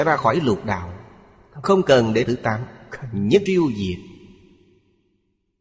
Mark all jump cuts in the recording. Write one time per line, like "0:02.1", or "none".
0:01.6
0:02.2
0:03.5